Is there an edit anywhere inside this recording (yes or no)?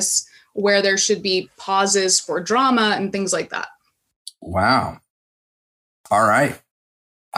no